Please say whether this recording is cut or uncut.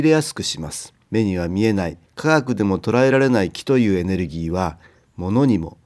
cut